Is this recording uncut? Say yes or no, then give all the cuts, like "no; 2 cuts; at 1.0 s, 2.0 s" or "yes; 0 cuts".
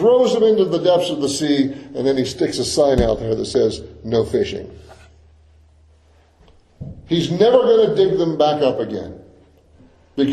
yes; 0 cuts